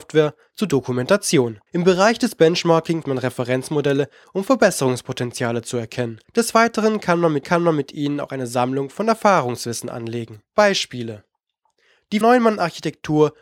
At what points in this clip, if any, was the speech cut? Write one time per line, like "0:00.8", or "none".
0:01.7
0:03.0
0:04.2
0:06.2
0:07.4
0:10.5
0:12.2